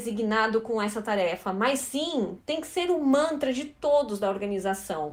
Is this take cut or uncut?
uncut